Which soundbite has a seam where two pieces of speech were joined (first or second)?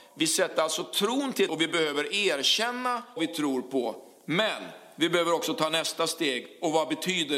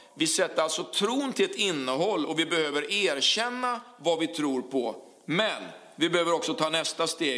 first